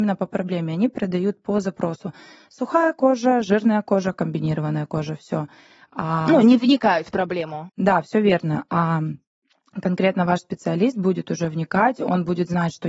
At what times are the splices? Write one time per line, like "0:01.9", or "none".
none